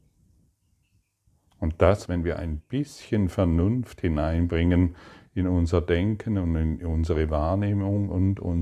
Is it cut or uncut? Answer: cut